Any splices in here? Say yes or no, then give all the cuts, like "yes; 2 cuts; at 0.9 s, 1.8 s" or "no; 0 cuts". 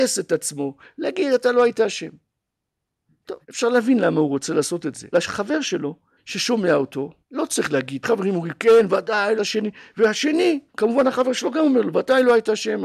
yes; 7 cuts; at 3.4 s, 5.1 s, 6.2 s, 7.2 s, 8.0 s, 9.4 s, 10.7 s